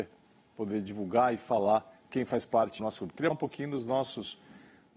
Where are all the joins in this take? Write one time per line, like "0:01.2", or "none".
0:02.8
0:03.3